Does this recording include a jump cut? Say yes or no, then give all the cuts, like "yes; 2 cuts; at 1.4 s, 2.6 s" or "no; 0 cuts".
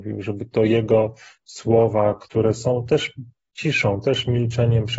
no; 0 cuts